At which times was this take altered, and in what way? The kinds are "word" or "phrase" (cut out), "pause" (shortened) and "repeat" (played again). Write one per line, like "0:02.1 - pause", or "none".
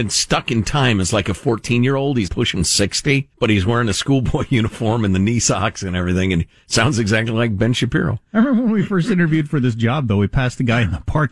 0:02.3 - word
0:03.3 - pause